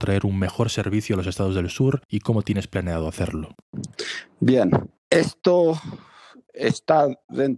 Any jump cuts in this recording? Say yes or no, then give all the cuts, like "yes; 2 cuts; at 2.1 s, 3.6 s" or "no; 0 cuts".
no; 0 cuts